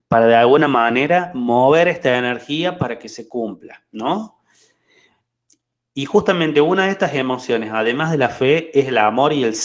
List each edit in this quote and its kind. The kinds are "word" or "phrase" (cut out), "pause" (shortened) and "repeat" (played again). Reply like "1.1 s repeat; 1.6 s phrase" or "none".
none